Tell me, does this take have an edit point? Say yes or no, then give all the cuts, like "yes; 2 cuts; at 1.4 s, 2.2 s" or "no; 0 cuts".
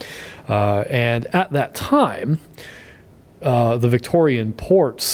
no; 0 cuts